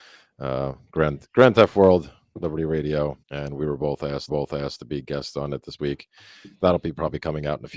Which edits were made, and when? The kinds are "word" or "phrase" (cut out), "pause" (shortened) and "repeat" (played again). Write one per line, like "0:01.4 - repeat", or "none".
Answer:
0:03.2 - pause
0:04.3 - repeat
0:05.8 - word